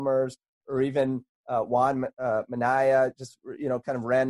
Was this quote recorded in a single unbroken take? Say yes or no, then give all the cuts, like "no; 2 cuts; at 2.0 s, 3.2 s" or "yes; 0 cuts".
yes; 0 cuts